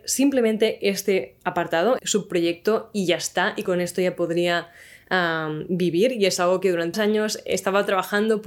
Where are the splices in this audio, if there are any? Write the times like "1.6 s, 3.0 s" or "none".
2.0 s, 6.9 s